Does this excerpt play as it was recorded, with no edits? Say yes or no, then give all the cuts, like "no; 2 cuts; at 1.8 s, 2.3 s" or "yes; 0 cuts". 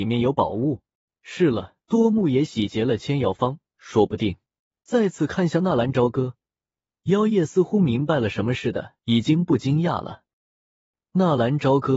no; 4 cuts; at 1.0 s, 1.8 s, 4.7 s, 9.0 s